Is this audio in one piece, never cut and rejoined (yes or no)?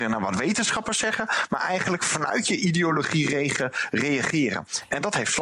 yes